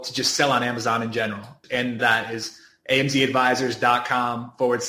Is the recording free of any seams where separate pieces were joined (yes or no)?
no